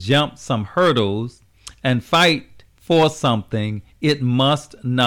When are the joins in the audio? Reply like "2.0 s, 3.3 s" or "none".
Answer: 2.7 s